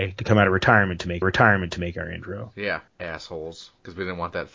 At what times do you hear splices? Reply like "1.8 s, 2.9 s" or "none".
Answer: 1.2 s, 2.9 s